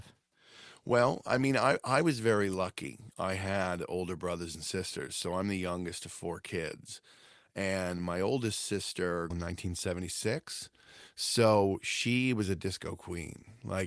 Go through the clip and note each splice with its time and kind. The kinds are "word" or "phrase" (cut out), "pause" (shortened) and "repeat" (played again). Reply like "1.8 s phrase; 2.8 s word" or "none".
9.3 s phrase